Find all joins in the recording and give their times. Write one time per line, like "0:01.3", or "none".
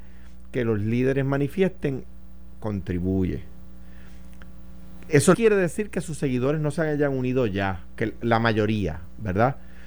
0:05.3

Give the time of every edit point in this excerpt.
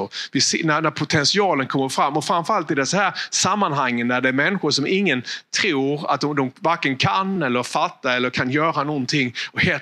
none

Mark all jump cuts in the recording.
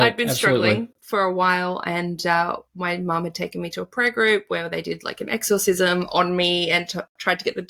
0:00.9
0:02.7

